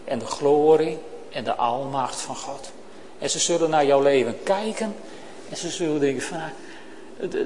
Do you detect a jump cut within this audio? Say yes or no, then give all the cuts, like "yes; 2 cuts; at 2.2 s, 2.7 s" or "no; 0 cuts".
no; 0 cuts